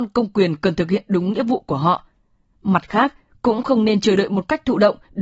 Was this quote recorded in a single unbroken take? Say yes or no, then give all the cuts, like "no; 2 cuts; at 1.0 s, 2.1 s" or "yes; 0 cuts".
yes; 0 cuts